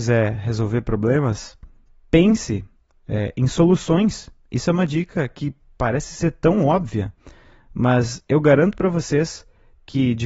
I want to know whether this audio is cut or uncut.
uncut